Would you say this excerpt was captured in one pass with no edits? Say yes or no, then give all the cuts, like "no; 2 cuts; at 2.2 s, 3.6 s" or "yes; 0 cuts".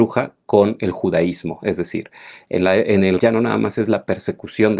no; 1 cut; at 3.2 s